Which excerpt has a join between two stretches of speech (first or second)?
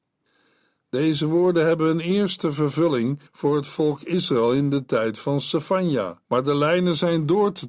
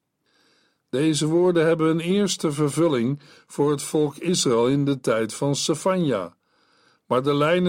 first